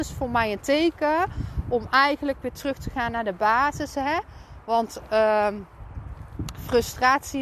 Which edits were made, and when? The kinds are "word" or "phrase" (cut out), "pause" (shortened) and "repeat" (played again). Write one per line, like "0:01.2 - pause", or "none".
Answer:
none